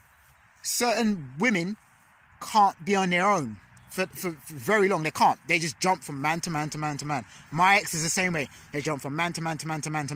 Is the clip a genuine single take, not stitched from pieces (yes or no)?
yes